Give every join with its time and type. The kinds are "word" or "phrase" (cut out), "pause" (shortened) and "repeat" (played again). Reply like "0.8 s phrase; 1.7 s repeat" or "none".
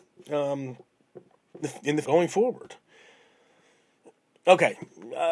1.6 s word; 2.0 s word